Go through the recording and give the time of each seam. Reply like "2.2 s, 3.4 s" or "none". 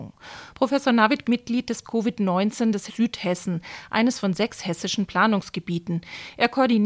1.2 s, 1.8 s, 2.9 s